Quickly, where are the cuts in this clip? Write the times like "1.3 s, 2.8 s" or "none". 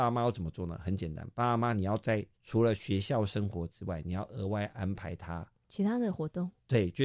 2.3 s